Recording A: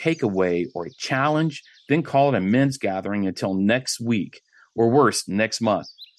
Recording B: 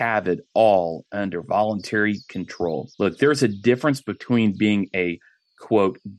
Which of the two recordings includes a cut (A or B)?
B